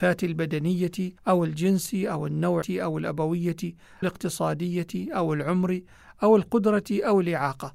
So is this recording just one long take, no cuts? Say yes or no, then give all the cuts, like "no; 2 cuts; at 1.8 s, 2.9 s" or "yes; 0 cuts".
no; 3 cuts; at 1.2 s, 2.6 s, 4.0 s